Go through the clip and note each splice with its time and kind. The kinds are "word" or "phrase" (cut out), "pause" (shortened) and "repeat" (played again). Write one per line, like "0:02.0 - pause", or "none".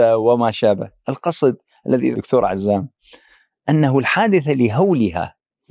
0:02.1 - word